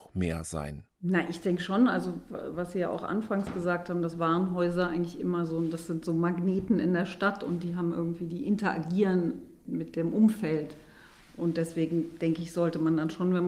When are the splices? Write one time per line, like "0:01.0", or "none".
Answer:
none